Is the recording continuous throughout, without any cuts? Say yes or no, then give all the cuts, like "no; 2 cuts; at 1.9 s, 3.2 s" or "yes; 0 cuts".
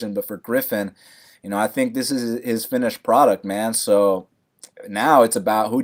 yes; 0 cuts